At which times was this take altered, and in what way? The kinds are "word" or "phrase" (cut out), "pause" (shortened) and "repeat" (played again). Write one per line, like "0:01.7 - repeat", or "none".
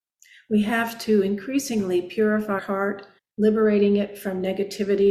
0:02.6 - word
0:03.2 - pause